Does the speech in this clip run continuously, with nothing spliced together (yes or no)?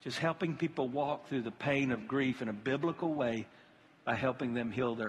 yes